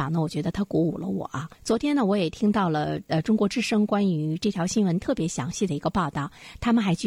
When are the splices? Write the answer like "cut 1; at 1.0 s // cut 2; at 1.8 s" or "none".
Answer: cut 1; at 1.5 s

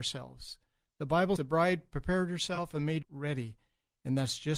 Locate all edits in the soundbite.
cut 1; at 1.4 s // cut 2; at 3.0 s

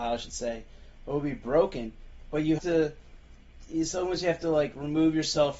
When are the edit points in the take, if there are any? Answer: cut 1; at 2.6 s

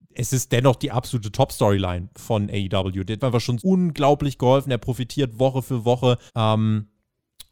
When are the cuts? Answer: cut 1; at 3.2 s // cut 2; at 3.6 s // cut 3; at 6.3 s

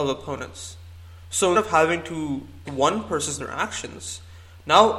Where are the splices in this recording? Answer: cut 1; at 1.5 s // cut 2; at 2.6 s // cut 3; at 3.4 s

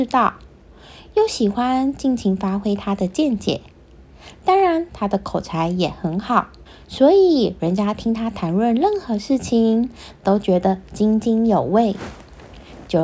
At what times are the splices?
cut 1; at 6.7 s

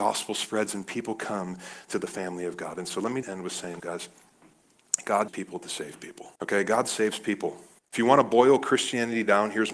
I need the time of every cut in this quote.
cut 1; at 3.2 s // cut 2; at 3.8 s // cut 3; at 5.3 s // cut 4; at 6.4 s // cut 5; at 7.8 s

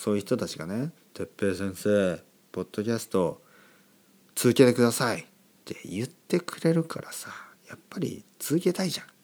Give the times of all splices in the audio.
cut 1; at 1.0 s // cut 2; at 5.5 s

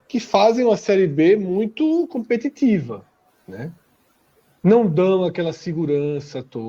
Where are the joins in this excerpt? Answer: none

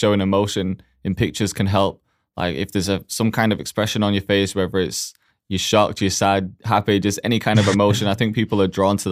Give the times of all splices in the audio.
none

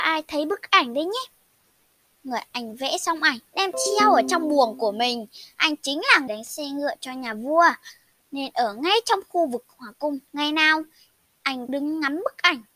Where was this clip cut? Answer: cut 1; at 3.5 s // cut 2; at 6.3 s // cut 3; at 10.3 s // cut 4; at 11.7 s

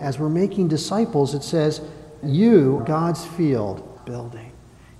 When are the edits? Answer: cut 1; at 2.2 s // cut 2; at 2.8 s // cut 3; at 4.0 s

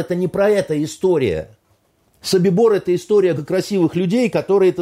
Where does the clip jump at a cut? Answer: cut 1; at 2.0 s // cut 2; at 3.3 s

